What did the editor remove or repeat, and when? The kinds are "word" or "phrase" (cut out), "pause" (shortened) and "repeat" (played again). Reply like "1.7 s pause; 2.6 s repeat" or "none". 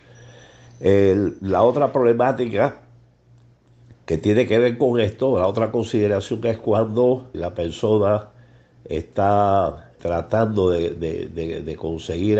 7.3 s word; 10.0 s word